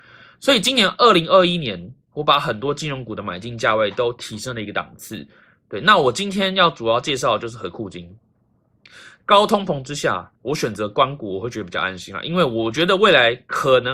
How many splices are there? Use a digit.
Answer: 1